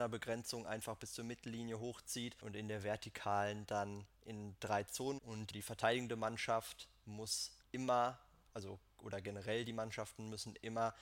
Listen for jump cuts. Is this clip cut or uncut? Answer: cut